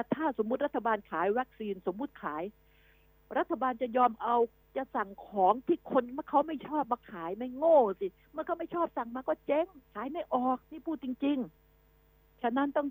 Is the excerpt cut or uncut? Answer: cut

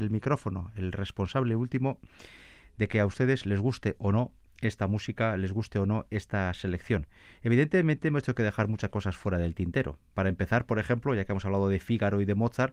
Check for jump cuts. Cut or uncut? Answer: uncut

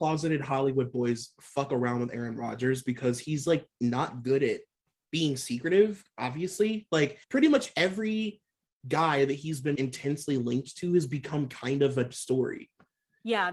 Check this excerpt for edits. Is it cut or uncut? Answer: cut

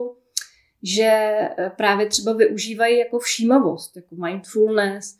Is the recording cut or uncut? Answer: uncut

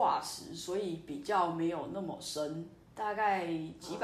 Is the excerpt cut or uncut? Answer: cut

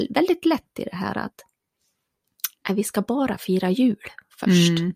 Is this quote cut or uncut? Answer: cut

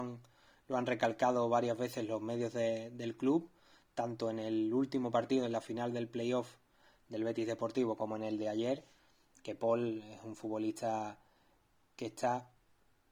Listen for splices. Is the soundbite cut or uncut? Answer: uncut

